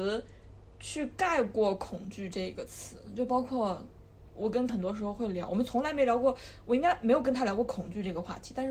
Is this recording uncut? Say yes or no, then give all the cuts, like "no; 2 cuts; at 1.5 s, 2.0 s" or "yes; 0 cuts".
no; 1 cut; at 4.7 s